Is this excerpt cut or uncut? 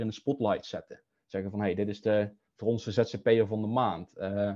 uncut